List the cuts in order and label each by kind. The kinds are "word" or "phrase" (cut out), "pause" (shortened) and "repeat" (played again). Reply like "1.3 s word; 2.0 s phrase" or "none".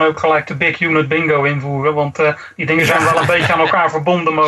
none